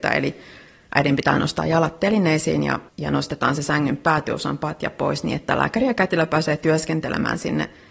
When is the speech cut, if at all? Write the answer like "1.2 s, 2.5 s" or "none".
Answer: 2.9 s